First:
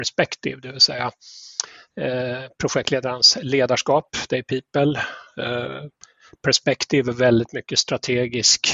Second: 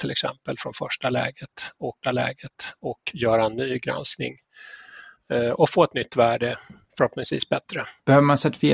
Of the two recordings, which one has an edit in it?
second; 1 cut; at 2.0 s

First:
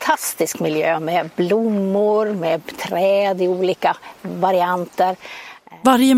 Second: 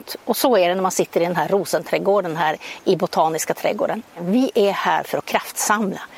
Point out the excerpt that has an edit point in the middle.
second; 1 cut; at 4.1 s

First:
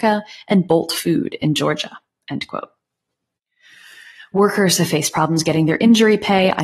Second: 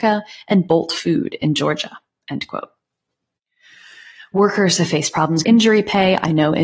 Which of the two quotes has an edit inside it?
second; 1 cut; at 5.4 s

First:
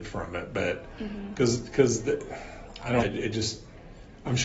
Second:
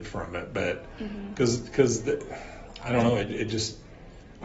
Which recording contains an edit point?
first; 1 cut; at 3.0 s

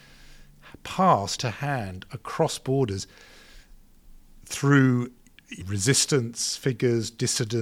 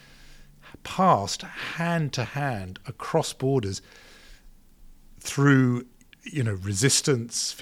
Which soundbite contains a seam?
first; 2 cuts; at 1.4 s, 5.6 s

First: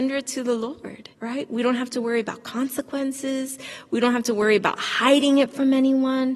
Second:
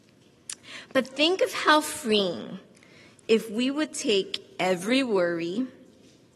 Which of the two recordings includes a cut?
first; 1 cut; at 1.1 s

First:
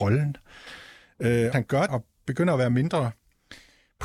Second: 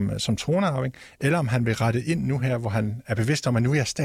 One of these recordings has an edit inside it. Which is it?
first; 2 cuts; at 1.5 s, 1.9 s

